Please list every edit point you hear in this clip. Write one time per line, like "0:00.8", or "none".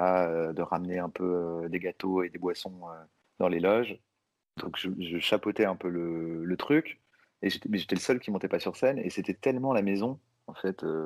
none